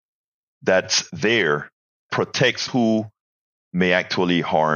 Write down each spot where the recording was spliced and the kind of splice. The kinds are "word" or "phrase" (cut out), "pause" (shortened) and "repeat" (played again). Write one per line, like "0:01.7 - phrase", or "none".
0:02.1 - word
0:02.7 - word